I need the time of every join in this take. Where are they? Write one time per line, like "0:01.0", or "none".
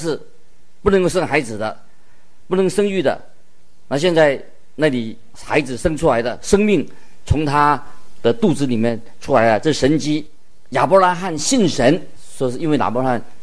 0:05.3

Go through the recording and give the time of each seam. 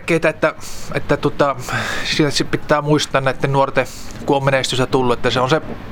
none

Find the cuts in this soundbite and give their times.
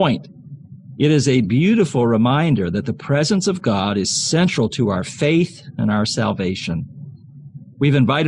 none

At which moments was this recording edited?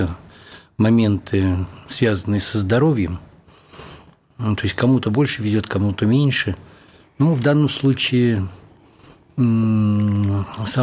none

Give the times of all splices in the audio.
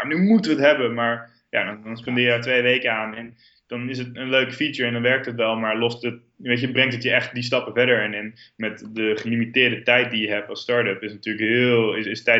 0:04.2

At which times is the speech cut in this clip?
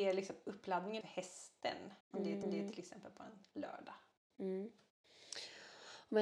0:01.0
0:02.0
0:02.4

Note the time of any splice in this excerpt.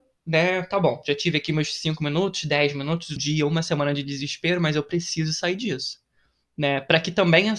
0:03.2

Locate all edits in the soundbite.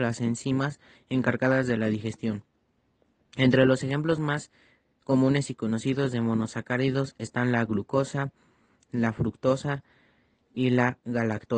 none

